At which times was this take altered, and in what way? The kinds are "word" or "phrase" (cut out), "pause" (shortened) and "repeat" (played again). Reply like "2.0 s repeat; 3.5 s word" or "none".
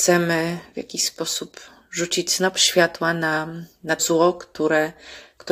4.0 s word